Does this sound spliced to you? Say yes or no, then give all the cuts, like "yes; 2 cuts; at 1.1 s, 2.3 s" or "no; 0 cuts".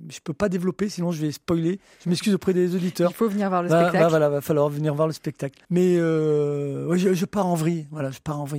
yes; 1 cut; at 5.6 s